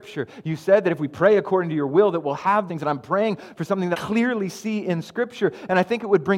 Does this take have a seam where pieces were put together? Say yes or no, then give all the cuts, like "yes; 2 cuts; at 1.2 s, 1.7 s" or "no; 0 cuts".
yes; 2 cuts; at 2.7 s, 3.9 s